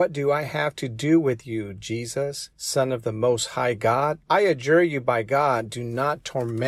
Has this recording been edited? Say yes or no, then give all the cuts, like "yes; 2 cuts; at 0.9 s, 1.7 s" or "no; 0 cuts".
yes; 2 cuts; at 2.5 s, 4.2 s